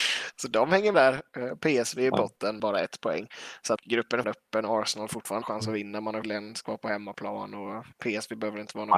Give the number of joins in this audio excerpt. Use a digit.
7